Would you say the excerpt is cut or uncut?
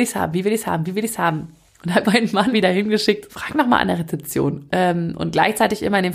cut